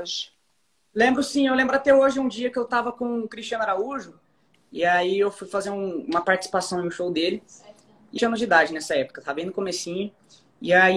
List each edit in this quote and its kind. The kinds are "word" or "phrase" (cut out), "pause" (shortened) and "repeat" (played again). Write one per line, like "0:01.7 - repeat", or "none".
0:08.2 - phrase